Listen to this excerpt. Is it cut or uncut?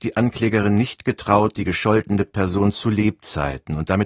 uncut